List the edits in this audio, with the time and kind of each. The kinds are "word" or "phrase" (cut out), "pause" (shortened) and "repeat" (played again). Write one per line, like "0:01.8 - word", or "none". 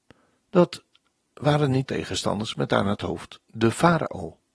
0:01.8 - word
0:03.4 - pause